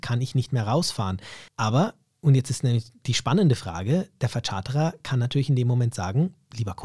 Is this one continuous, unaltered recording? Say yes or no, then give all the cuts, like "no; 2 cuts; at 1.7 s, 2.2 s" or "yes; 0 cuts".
no; 1 cut; at 1.5 s